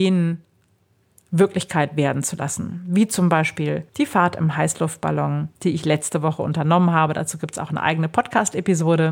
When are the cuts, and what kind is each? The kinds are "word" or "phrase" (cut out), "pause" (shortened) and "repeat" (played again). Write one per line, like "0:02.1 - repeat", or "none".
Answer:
0:03.9 - pause
0:05.6 - pause